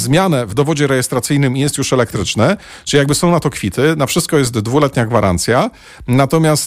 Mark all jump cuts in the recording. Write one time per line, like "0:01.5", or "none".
none